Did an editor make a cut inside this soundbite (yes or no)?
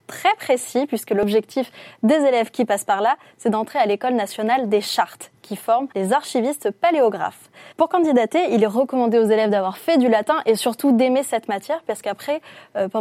yes